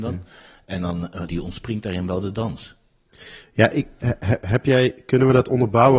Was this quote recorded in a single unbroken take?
no; 1 cut; at 1.3 s

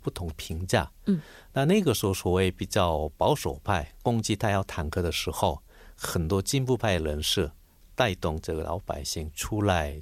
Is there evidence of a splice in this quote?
no; 0 cuts

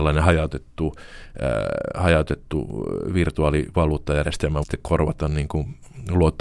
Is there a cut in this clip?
yes; 1 cut; at 4.6 s

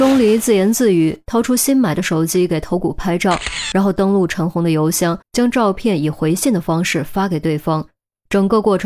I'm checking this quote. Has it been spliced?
yes; 1 cut; at 5.2 s

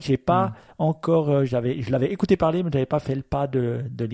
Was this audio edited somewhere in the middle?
no; 0 cuts

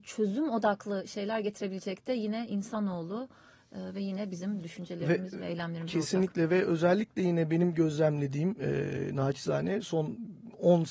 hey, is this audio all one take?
yes; 0 cuts

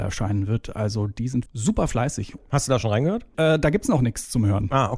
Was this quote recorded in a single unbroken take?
no; 1 cut; at 1.5 s

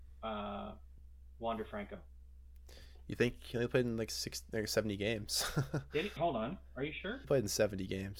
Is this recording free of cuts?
no; 2 cuts; at 6.2 s, 7.2 s

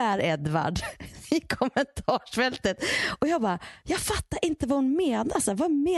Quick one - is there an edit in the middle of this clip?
no; 0 cuts

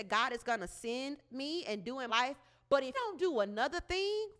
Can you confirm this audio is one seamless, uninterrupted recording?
no; 2 cuts; at 2.1 s, 2.9 s

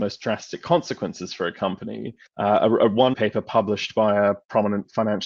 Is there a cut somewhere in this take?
yes; 2 cuts; at 2.3 s, 3.1 s

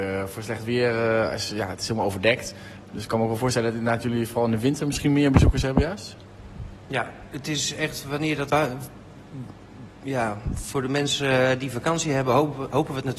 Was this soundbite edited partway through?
yes; 1 cut; at 8.5 s

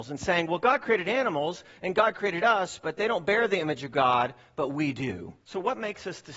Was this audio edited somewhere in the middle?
yes; 1 cut; at 5.4 s

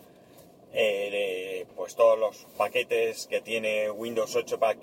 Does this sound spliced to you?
no; 0 cuts

